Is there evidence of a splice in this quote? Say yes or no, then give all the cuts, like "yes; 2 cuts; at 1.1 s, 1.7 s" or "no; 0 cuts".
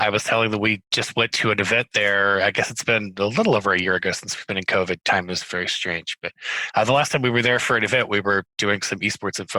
no; 0 cuts